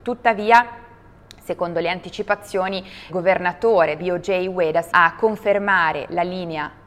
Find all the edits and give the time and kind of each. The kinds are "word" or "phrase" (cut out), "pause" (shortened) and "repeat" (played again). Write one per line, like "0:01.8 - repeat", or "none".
0:03.1 - word
0:04.0 - word
0:04.9 - word